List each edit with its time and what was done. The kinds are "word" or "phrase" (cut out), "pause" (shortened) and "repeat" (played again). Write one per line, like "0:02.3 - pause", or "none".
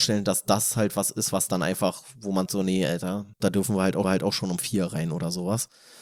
0:02.5 - word
0:03.3 - pause
0:04.0 - repeat